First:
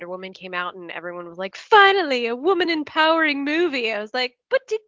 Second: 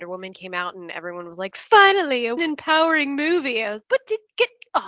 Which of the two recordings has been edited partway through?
second; 2 cuts; at 2.4 s, 3.8 s

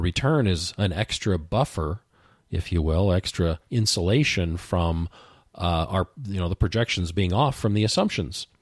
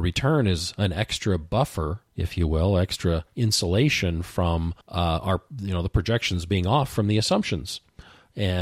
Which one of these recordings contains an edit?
second; 2 cuts; at 2.1 s, 4.8 s

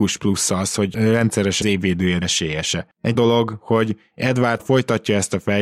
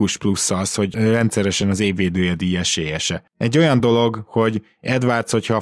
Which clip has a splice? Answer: first; 4 cuts; at 1.6 s, 2.2 s, 3.1 s, 4.6 s

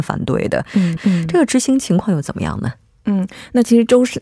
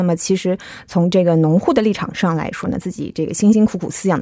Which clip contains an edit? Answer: first; 1 cut; at 1.0 s

